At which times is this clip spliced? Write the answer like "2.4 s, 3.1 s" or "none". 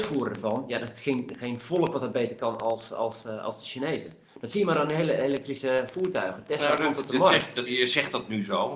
7.7 s